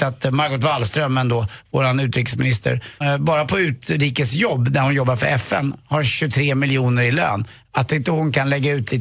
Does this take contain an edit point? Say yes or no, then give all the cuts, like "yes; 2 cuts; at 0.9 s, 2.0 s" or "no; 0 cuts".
yes; 1 cut; at 3.0 s